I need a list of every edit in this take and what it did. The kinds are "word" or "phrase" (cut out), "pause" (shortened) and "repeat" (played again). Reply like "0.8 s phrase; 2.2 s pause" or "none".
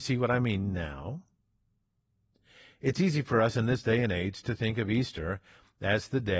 none